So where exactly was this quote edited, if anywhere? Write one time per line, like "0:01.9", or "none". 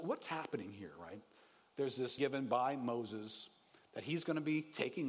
0:02.2